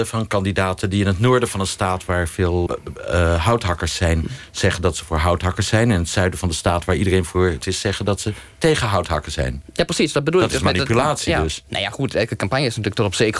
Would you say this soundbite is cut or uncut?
cut